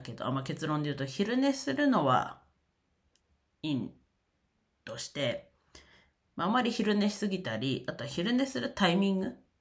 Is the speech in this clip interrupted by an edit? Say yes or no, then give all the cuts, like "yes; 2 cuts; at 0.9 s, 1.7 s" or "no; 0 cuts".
no; 0 cuts